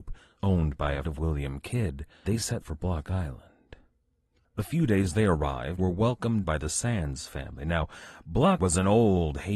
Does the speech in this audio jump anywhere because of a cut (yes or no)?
yes